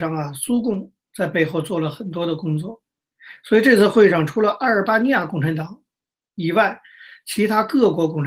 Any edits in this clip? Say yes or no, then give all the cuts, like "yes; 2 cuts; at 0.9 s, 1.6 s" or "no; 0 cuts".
no; 0 cuts